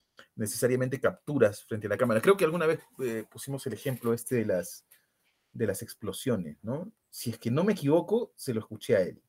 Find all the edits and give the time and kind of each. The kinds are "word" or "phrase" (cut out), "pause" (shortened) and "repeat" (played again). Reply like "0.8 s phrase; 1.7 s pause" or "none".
none